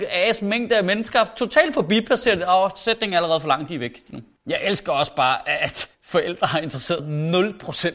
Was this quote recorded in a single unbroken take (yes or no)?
no